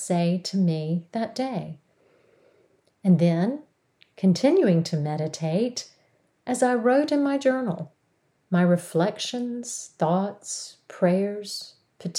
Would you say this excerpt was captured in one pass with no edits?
yes; 0 cuts

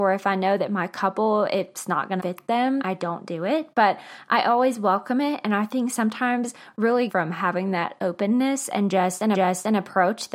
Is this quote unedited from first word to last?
no; 4 cuts; at 2.2 s, 2.8 s, 7.1 s, 9.3 s

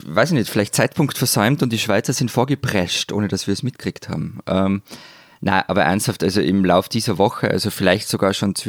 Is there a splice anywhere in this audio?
no; 0 cuts

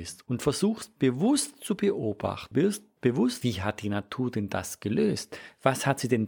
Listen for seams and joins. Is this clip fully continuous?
no; 2 cuts; at 2.5 s, 3.4 s

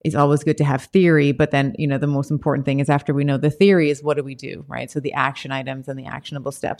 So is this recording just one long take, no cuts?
yes; 0 cuts

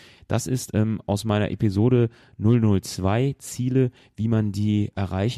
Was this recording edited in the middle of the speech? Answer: no; 0 cuts

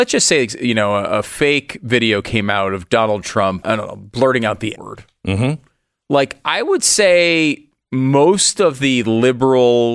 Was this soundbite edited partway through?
yes; 2 cuts; at 3.6 s, 4.8 s

